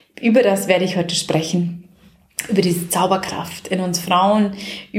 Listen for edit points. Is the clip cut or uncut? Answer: uncut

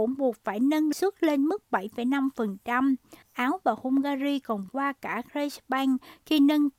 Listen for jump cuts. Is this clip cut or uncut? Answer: cut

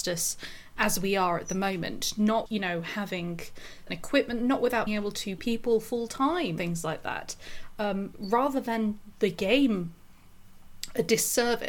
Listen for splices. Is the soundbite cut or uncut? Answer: cut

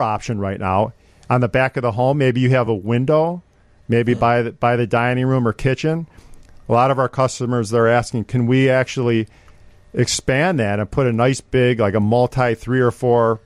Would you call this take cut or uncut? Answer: uncut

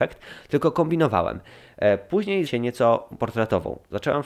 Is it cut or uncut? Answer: cut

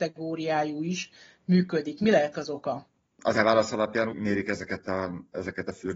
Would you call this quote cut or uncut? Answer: cut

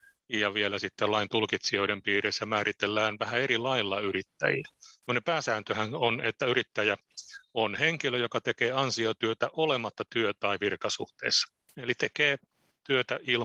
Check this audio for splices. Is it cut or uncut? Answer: uncut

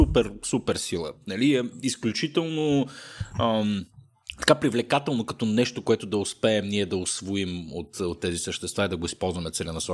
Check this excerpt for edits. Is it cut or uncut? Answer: cut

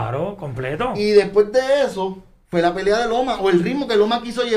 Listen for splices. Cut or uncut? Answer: uncut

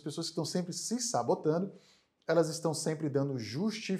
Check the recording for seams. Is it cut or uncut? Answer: uncut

